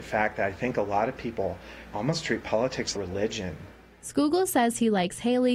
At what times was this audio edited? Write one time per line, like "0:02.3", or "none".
0:02.9